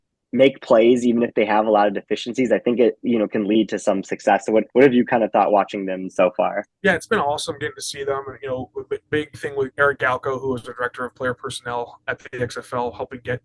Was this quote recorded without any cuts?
no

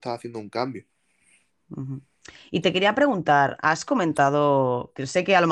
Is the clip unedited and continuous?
yes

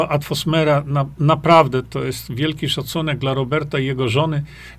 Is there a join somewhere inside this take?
no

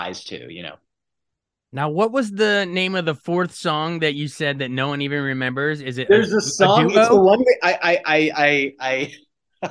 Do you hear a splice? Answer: no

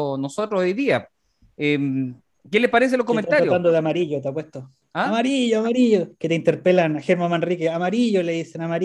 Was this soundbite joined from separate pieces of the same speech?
no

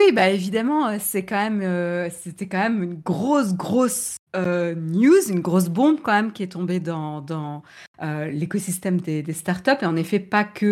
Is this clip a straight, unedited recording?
no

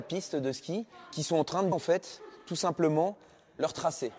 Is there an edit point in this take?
yes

